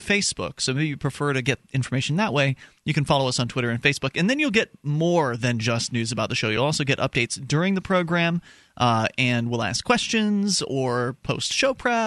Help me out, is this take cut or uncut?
uncut